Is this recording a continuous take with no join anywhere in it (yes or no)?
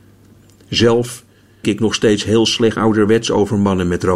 no